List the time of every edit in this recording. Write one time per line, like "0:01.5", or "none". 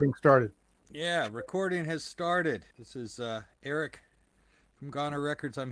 0:02.7